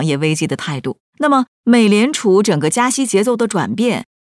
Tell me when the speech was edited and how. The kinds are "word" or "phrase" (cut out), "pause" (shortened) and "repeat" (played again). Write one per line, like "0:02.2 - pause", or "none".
0:01.1 - pause